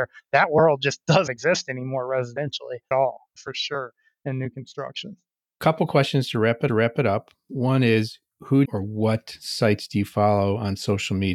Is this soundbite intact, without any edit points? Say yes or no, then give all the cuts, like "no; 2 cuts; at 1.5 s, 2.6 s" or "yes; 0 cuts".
no; 4 cuts; at 1.3 s, 2.9 s, 6.7 s, 8.6 s